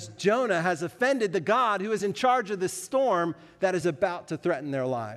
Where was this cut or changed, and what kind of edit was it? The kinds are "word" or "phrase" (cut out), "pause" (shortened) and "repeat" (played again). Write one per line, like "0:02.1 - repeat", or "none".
none